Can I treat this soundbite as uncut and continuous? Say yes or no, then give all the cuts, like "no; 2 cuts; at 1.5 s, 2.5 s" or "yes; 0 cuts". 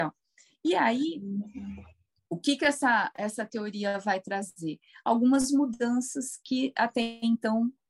yes; 0 cuts